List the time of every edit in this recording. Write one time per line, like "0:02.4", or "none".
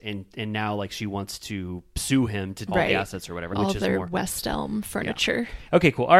0:02.7
0:03.5